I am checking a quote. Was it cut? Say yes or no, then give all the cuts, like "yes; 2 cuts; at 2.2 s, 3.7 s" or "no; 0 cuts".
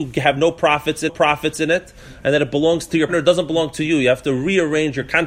yes; 2 cuts; at 1.1 s, 3.1 s